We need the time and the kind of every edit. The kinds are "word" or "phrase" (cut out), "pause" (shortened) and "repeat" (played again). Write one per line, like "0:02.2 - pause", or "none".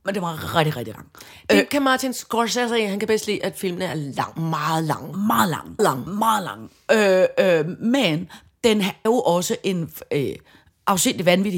0:00.9 - word
0:05.8 - word
0:09.1 - word